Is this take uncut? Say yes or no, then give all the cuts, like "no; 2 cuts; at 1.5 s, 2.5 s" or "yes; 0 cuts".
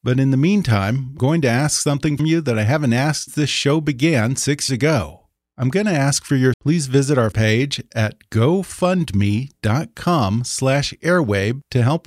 no; 6 cuts; at 1.2 s, 2.2 s, 3.3 s, 4.7 s, 6.5 s, 7.3 s